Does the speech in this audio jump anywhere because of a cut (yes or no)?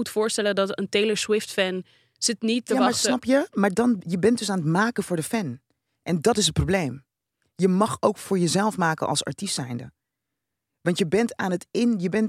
no